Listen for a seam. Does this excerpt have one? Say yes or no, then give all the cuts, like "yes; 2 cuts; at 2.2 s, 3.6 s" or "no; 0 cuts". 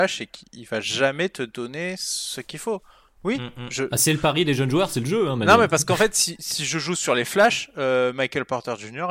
no; 0 cuts